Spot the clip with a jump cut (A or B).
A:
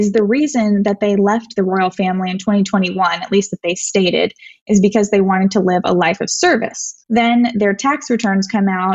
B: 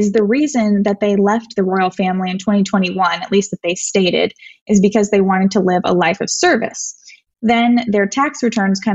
A